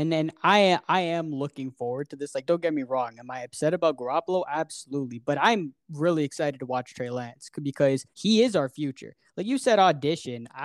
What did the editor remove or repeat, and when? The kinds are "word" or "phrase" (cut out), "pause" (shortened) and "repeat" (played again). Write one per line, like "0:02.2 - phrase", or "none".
0:08.1 - pause